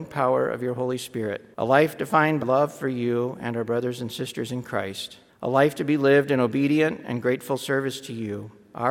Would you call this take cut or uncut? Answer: cut